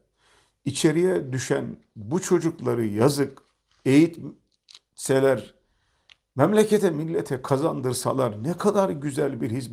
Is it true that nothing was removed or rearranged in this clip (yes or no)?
yes